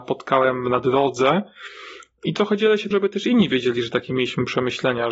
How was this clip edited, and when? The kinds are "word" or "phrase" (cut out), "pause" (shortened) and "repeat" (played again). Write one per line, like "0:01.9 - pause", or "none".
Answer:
0:02.9 - word

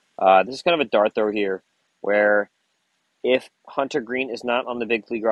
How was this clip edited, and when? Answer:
none

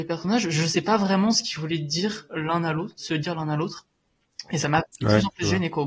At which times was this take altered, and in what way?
none

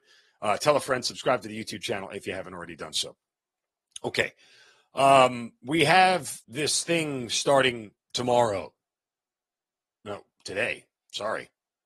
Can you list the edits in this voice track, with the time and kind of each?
0:06.4 - pause

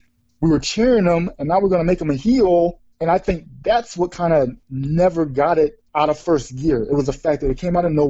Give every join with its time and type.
0:02.9 - pause
0:04.6 - pause
0:05.9 - pause

